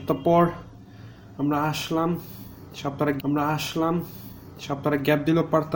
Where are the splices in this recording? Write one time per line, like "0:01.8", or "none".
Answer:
0:03.2